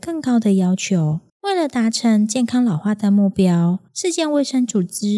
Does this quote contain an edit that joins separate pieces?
yes; 2 cuts; at 1.3 s, 3.9 s

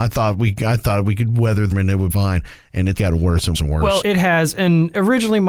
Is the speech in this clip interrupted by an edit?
yes; 5 cuts; at 1.7 s, 2.1 s, 3.0 s, 3.5 s, 4.0 s

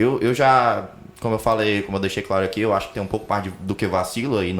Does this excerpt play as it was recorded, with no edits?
yes; 0 cuts

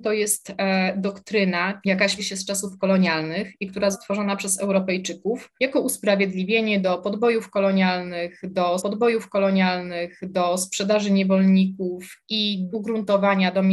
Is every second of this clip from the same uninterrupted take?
no; 6 cuts; at 1.8 s, 2.2 s, 3.9 s, 5.6 s, 8.8 s, 12.7 s

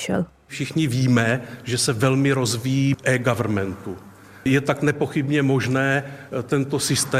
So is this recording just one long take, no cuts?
no; 1 cut; at 2.9 s

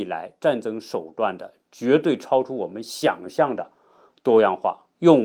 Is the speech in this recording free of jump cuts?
yes; 0 cuts

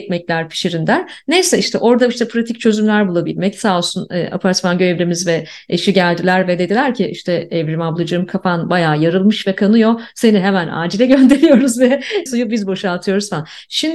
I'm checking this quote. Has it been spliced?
yes; 1 cut; at 12.3 s

